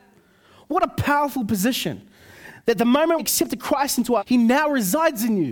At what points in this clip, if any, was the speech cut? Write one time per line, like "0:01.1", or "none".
0:03.2
0:04.2